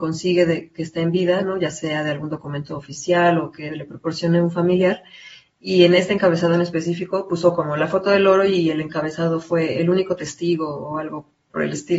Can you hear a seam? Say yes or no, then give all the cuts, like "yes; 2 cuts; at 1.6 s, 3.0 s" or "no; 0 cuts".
no; 0 cuts